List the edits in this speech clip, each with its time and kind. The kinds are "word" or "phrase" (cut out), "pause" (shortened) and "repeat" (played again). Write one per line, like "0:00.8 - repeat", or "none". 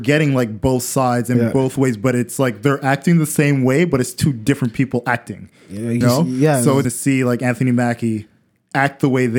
0:06.0 - word
0:06.8 - phrase

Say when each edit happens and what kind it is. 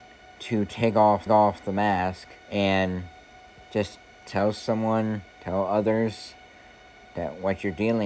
0:01.3 - repeat
0:02.4 - pause
0:05.3 - pause

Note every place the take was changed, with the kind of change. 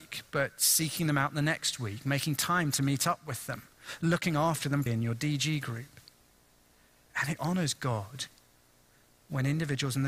0:04.9 - word
0:07.4 - word

